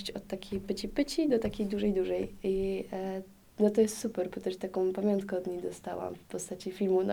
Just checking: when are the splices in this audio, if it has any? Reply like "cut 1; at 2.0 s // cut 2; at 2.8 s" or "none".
none

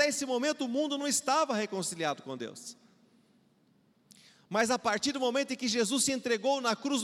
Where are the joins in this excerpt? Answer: none

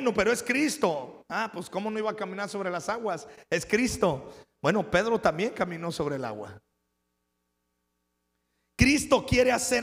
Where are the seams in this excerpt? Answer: none

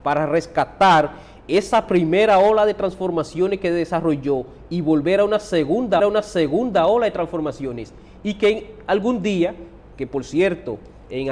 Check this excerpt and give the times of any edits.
cut 1; at 6.0 s

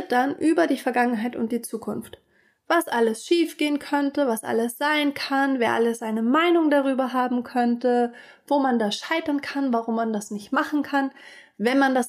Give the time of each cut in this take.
none

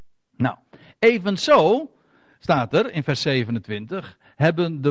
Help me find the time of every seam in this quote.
none

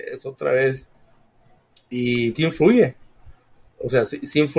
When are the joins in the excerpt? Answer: cut 1; at 2.3 s

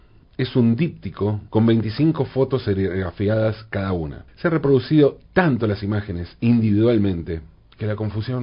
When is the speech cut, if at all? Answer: cut 1; at 1.5 s // cut 2; at 4.3 s

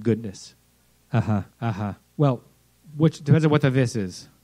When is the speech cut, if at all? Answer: cut 1; at 1.5 s // cut 2; at 2.0 s

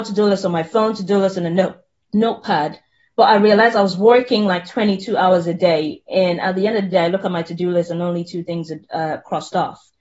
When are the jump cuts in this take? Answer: none

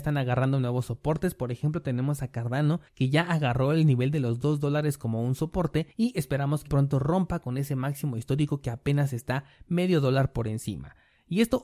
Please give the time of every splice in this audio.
cut 1; at 2.9 s // cut 2; at 5.9 s // cut 3; at 6.7 s

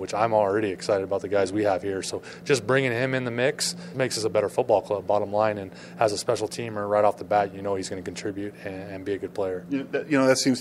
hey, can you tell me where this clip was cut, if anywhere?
cut 1; at 3.9 s

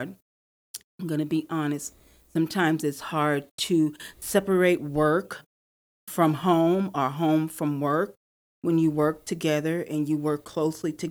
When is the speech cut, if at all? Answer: none

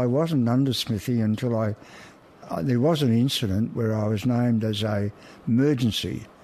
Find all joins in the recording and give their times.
none

